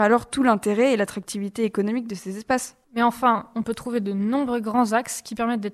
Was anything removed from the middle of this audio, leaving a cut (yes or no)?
yes